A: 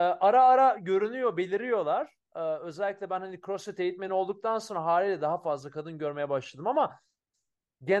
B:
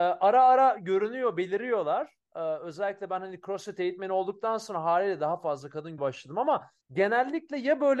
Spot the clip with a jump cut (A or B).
B